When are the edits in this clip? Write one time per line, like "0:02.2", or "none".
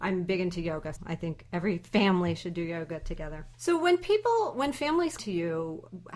0:01.0
0:03.5
0:05.2